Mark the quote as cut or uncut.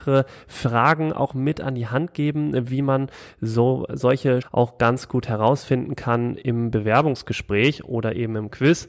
cut